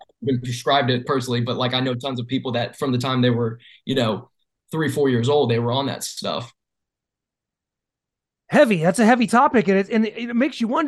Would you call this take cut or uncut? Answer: cut